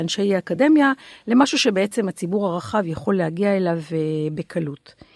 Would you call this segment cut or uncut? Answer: uncut